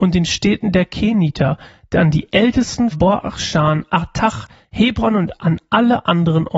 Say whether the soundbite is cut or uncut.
cut